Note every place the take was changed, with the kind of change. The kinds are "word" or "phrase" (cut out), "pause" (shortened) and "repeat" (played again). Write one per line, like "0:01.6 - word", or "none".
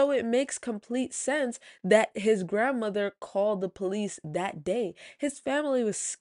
none